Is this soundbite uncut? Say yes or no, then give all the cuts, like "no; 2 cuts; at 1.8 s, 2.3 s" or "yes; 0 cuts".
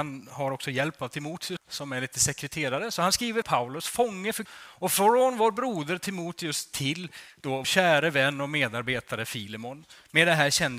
no; 4 cuts; at 1.6 s, 3.4 s, 4.5 s, 7.6 s